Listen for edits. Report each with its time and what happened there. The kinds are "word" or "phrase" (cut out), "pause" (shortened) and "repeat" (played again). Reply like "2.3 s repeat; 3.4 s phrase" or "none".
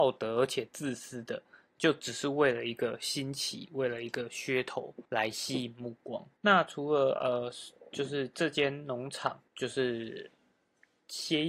5.0 s pause; 6.4 s pause; 9.5 s pause